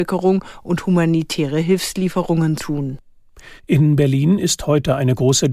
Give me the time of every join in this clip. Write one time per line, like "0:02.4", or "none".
0:02.6
0:03.6